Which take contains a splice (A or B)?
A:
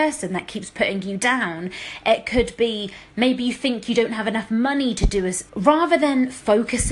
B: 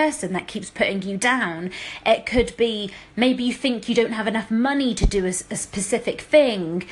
A